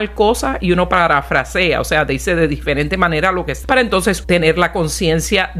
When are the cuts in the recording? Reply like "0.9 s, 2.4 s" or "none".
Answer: 3.6 s, 4.2 s